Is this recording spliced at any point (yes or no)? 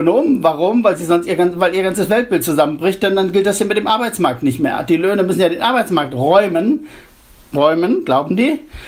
no